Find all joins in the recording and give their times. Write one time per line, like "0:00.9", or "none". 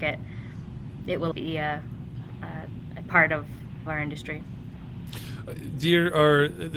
0:01.3
0:03.0
0:03.9

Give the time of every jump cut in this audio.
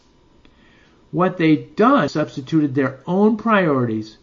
0:02.1

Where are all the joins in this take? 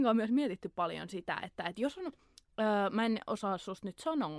none

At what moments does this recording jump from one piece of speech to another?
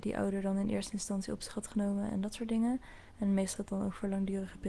0:03.6

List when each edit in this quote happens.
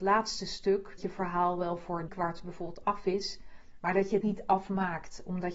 0:01.0
0:02.1
0:04.2

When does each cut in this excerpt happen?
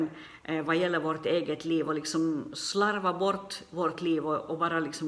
none

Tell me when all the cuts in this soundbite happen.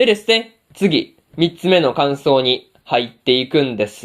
none

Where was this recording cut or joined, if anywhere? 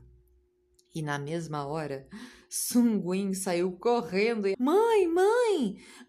0:04.5

